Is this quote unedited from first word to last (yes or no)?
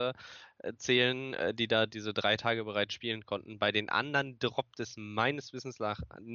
yes